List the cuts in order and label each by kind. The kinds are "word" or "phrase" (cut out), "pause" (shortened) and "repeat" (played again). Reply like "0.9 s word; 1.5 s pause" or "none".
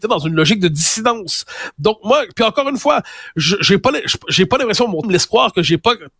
5.0 s word